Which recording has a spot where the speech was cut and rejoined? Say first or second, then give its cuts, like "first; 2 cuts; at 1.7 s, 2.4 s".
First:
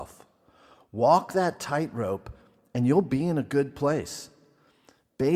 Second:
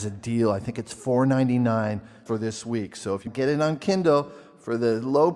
second; 2 cuts; at 2.3 s, 3.3 s